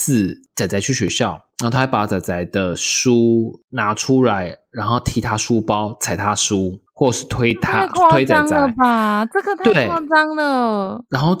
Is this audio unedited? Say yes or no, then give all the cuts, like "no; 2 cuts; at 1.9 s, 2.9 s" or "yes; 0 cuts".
yes; 0 cuts